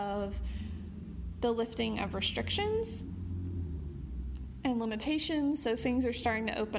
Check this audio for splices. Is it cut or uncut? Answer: uncut